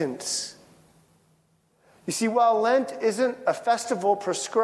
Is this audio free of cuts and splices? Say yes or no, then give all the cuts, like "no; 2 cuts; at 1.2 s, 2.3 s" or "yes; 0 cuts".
yes; 0 cuts